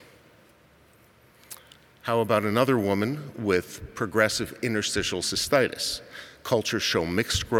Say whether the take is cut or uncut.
uncut